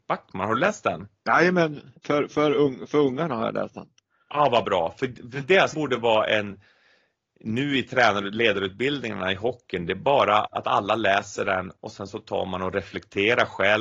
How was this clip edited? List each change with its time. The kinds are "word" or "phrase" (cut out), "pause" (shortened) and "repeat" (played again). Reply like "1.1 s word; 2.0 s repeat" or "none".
2.0 s pause; 5.7 s phrase; 10.5 s word